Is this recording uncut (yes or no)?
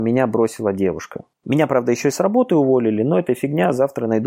no